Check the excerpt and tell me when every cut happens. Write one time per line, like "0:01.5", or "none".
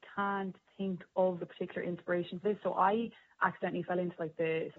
0:01.4
0:02.4